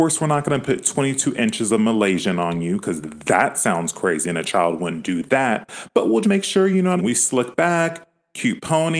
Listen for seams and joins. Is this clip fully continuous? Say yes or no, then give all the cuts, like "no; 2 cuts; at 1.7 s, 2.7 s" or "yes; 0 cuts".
no; 2 cuts; at 6.2 s, 7.0 s